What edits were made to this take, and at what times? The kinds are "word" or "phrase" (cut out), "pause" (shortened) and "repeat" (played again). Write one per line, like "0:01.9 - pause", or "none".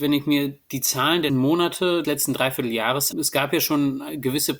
0:01.3 - word
0:02.0 - word
0:03.1 - word

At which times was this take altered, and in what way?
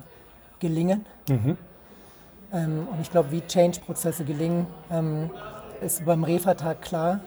0:03.8 - word
0:05.8 - word

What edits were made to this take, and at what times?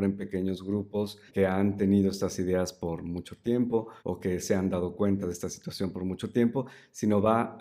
0:01.3 - pause
0:04.0 - pause

